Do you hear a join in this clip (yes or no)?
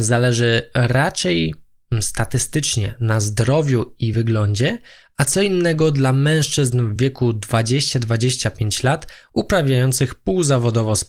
no